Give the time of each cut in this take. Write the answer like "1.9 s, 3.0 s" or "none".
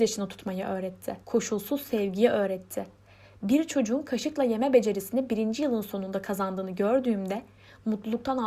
1.2 s